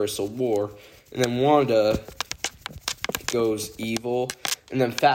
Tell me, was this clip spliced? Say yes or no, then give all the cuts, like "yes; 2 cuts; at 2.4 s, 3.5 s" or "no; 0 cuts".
no; 0 cuts